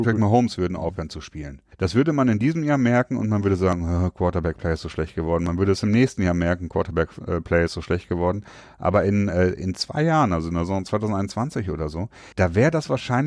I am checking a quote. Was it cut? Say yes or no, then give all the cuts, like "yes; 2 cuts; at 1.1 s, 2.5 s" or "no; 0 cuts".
yes; 2 cuts; at 1.7 s, 12.3 s